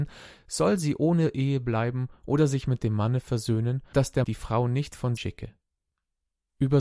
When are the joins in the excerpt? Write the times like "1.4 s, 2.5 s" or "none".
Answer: 3.9 s, 4.2 s, 5.2 s